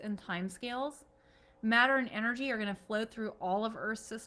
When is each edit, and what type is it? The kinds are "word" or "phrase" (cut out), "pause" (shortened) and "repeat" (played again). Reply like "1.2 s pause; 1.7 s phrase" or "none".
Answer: none